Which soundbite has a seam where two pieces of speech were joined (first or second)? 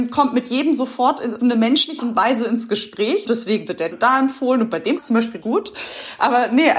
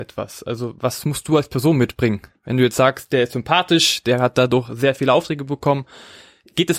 first